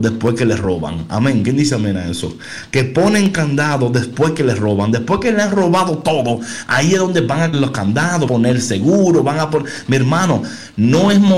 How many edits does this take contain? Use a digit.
2